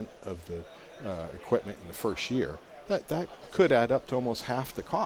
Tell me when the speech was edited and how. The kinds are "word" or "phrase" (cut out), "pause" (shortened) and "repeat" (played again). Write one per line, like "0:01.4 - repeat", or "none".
none